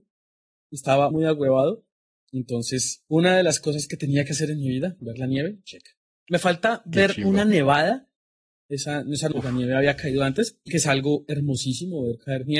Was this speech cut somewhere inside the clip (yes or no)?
yes